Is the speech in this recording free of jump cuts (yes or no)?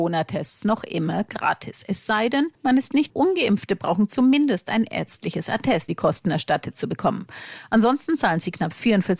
no